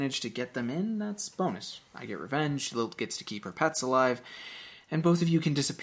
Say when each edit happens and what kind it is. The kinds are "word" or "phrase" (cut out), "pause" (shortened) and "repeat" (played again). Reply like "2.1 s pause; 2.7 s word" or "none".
none